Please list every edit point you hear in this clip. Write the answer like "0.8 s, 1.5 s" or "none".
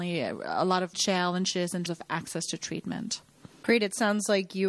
0.9 s, 1.9 s